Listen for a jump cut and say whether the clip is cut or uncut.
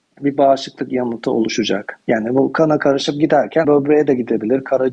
cut